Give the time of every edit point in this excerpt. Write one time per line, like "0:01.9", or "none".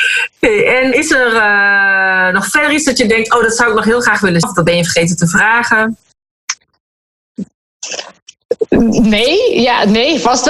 0:00.9
0:04.4